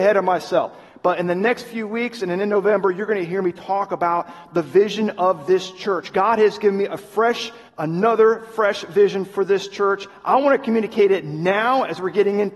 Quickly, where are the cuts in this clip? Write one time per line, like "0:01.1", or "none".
0:07.7